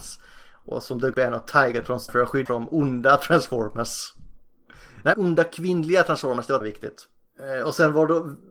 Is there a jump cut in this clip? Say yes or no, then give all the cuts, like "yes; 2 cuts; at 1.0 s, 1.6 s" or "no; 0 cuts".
yes; 5 cuts; at 1.1 s, 2.1 s, 2.5 s, 5.1 s, 6.6 s